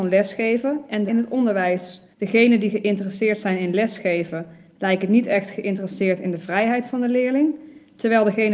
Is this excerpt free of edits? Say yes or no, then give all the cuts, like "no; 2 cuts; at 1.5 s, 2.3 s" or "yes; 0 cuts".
no; 2 cuts; at 1.1 s, 2.1 s